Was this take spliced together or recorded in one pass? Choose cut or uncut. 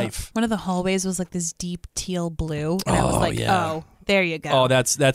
uncut